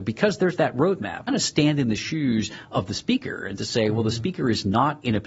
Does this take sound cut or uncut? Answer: cut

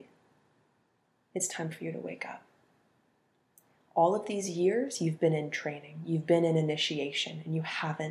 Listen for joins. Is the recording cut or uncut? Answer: uncut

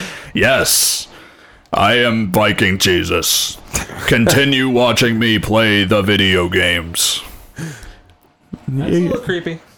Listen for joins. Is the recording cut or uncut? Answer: uncut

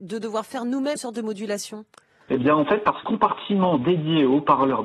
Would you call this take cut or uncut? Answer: cut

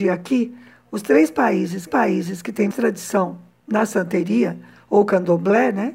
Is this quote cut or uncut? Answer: cut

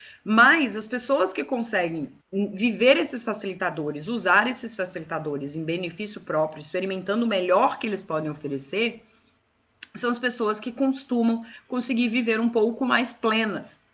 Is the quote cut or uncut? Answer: cut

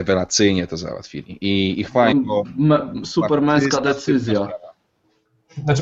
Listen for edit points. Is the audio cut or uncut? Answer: cut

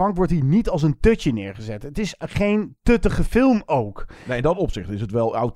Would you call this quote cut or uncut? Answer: uncut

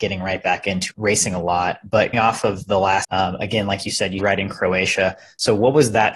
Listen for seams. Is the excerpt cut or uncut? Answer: cut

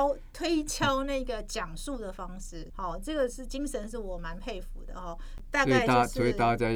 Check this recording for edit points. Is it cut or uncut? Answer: cut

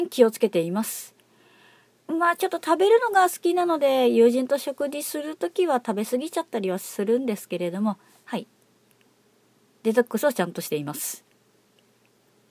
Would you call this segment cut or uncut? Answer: uncut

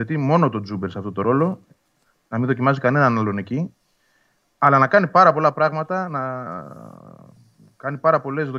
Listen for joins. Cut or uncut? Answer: uncut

